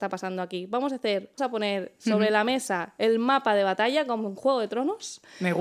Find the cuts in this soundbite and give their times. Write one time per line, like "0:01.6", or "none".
0:01.4